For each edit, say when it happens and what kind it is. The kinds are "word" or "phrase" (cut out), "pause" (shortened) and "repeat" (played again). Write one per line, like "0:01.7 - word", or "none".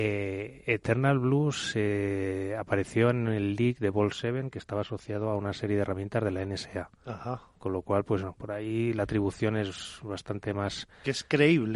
none